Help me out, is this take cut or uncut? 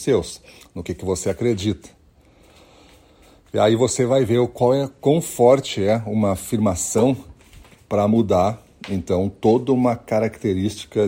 uncut